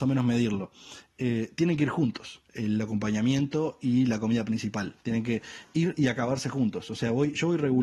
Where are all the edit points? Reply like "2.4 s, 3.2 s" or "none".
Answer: 2.5 s